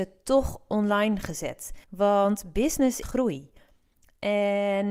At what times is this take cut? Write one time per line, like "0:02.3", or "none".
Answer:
0:01.8
0:03.0